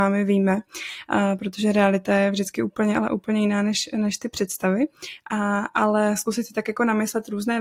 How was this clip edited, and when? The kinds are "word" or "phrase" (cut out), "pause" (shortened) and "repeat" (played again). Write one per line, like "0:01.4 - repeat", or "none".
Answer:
none